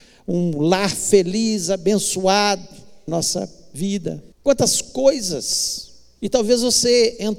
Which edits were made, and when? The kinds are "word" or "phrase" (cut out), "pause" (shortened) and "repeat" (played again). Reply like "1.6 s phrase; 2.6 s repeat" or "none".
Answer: 3.1 s word; 4.3 s pause